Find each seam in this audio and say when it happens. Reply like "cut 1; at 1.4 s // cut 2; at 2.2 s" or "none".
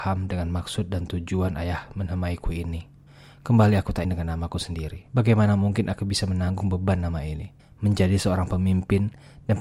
cut 1; at 3.1 s // cut 2; at 4.0 s // cut 3; at 5.1 s // cut 4; at 7.6 s